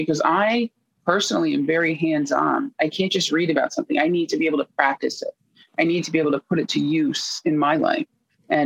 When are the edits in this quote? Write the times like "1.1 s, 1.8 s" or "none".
none

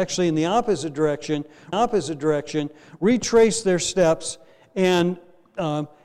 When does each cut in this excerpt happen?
1.7 s

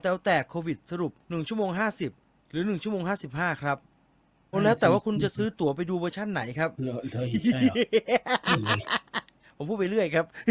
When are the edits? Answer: 1.2 s, 2.3 s, 4.5 s, 6.7 s

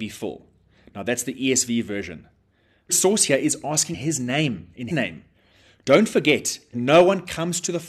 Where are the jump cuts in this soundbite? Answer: 2.9 s, 3.9 s, 4.9 s, 6.7 s

